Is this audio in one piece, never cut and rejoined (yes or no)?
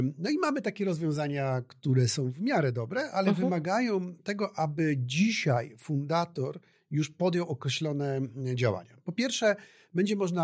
yes